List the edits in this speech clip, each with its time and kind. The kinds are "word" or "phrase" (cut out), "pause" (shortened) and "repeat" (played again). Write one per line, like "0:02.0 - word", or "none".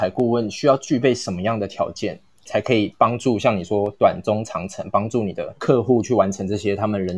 0:05.6 - pause